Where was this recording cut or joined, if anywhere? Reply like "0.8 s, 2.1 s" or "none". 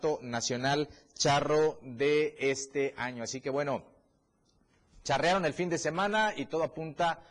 none